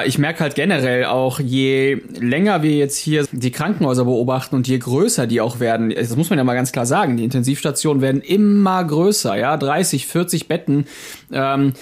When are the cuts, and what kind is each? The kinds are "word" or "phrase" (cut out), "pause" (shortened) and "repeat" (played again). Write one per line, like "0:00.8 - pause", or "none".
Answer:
0:03.2 - word